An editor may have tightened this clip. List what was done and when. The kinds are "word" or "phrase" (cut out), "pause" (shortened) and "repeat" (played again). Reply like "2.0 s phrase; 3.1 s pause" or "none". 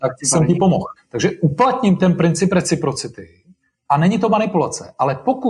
1.0 s pause; 3.6 s pause